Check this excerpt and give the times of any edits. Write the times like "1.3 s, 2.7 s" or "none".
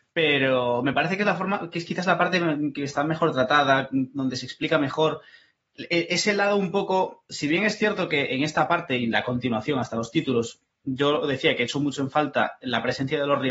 none